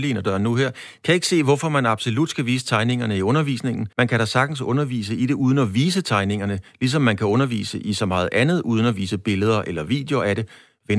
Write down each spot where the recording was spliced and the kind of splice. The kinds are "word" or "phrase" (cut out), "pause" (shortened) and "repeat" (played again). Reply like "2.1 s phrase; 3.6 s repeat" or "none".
3.9 s pause